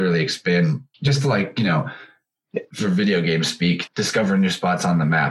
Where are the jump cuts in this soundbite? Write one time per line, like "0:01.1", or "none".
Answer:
0:00.9
0:03.9